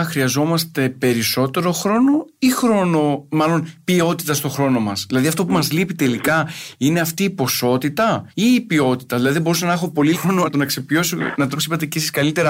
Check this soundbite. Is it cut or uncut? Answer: cut